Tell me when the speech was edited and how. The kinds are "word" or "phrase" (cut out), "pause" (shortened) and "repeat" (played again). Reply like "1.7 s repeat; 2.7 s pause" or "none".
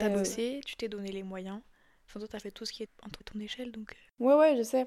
2.9 s word; 3.2 s word